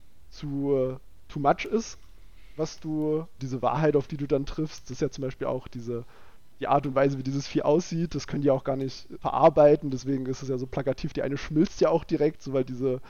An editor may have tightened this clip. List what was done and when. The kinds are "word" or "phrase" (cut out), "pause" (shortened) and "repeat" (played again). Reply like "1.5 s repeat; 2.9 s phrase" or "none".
3.4 s word; 9.2 s word